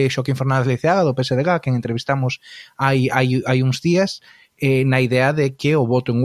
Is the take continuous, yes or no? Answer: yes